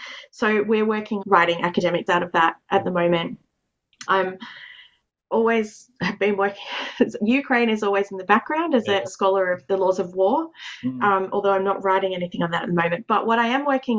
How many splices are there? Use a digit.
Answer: 6